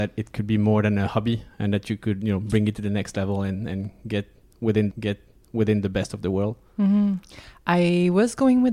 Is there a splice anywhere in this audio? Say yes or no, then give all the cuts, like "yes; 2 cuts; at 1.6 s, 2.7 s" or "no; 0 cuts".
yes; 1 cut; at 4.9 s